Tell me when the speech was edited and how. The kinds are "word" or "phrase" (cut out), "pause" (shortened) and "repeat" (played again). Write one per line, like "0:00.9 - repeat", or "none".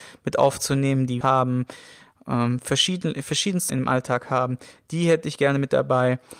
0:01.2 - phrase
0:03.7 - word